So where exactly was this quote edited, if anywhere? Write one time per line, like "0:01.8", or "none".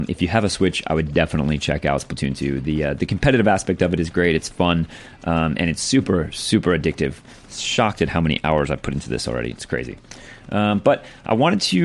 none